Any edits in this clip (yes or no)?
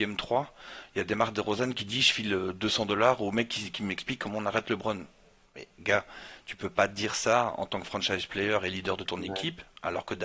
no